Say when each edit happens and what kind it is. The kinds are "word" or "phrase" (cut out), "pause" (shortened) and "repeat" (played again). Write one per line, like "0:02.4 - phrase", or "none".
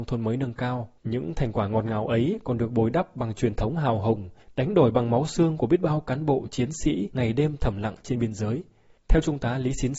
0:01.0 - pause